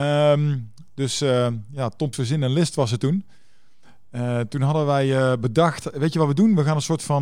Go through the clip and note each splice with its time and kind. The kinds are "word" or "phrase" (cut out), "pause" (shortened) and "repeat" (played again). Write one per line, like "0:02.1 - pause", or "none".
0:02.1 - word